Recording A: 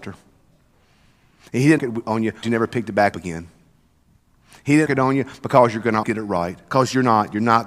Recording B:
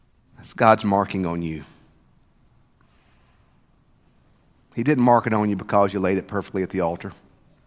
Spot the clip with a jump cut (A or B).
A